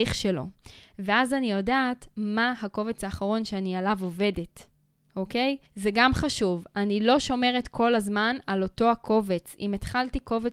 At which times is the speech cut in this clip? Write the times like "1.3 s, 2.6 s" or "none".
5.7 s